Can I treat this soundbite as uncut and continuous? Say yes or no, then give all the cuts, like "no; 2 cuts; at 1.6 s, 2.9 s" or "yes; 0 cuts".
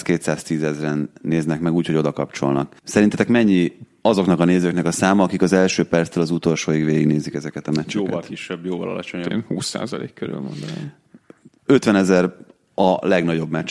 no; 1 cut; at 2.8 s